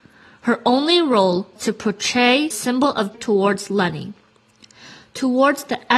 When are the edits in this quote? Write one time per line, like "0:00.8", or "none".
0:01.6
0:02.5
0:03.1